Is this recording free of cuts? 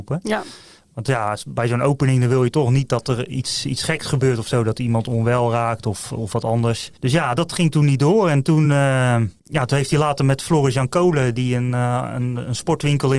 yes; 0 cuts

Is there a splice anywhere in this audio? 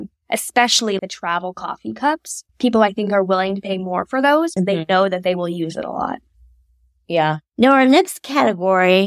yes; 3 cuts; at 1.0 s, 2.5 s, 4.6 s

